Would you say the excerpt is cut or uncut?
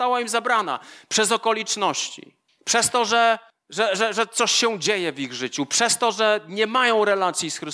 cut